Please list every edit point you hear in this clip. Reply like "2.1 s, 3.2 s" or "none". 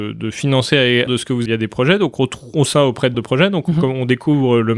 1.1 s, 1.5 s, 2.7 s, 3.1 s